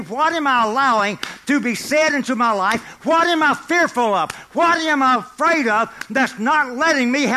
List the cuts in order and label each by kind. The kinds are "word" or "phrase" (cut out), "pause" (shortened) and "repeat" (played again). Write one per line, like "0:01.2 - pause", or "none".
none